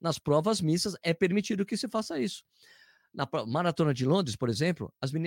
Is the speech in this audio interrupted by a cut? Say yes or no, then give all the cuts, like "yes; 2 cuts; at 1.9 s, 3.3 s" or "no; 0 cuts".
no; 0 cuts